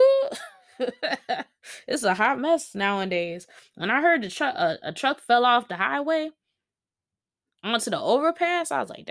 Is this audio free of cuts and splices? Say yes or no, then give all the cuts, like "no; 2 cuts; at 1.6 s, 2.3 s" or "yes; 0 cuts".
yes; 0 cuts